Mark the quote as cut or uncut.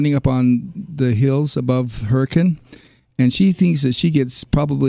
uncut